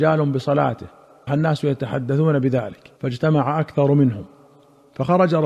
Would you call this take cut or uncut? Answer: cut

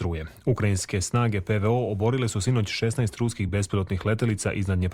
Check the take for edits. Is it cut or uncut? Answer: uncut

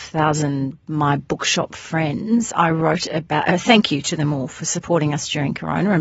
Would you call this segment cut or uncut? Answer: uncut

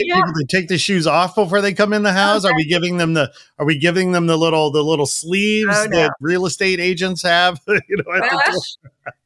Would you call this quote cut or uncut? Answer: uncut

